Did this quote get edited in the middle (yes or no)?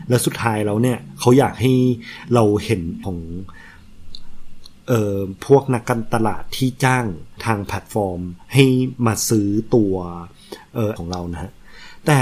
yes